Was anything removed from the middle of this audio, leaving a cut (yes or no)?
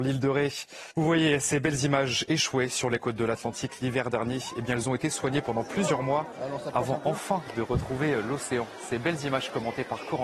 yes